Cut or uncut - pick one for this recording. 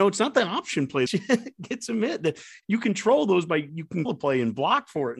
cut